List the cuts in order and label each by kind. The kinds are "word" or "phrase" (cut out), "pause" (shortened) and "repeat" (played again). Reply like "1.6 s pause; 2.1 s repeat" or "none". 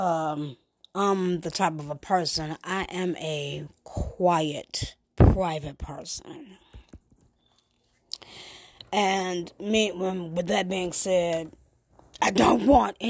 5.0 s pause